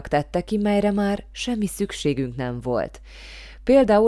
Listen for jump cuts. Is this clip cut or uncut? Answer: uncut